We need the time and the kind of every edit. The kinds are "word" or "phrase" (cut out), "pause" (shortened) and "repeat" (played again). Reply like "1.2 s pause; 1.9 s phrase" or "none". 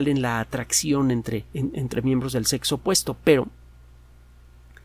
1.5 s pause